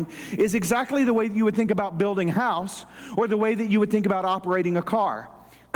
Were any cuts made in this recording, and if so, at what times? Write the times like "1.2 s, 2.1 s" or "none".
none